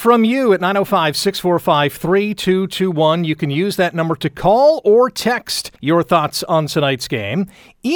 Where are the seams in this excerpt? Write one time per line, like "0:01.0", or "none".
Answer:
0:05.8